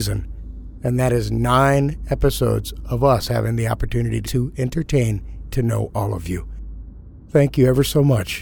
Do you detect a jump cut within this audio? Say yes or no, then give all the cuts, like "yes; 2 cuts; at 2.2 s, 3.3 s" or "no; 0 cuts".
yes; 2 cuts; at 4.2 s, 5.5 s